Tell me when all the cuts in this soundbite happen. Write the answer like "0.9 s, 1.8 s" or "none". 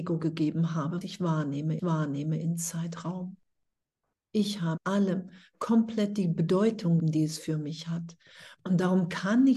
1.0 s, 1.8 s, 4.8 s, 7.0 s